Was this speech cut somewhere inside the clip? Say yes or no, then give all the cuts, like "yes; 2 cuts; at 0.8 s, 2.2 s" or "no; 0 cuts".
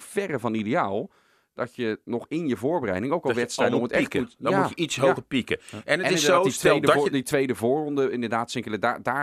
no; 0 cuts